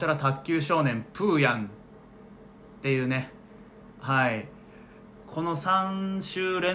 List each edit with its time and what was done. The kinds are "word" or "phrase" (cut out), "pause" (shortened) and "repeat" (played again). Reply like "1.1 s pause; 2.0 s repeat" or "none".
3.9 s pause